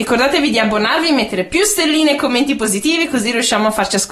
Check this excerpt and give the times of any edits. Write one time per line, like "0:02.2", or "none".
none